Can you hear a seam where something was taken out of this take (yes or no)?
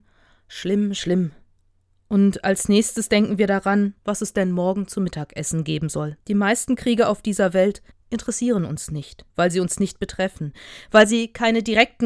yes